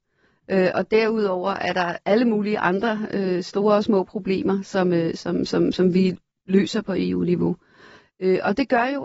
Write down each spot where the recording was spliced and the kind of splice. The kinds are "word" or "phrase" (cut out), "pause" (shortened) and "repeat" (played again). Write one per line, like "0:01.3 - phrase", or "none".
none